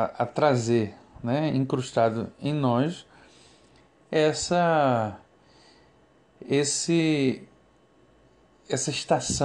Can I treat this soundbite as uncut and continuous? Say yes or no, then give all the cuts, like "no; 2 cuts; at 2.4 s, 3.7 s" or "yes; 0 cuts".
yes; 0 cuts